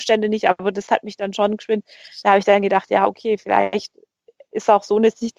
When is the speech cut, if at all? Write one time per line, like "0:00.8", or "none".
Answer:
none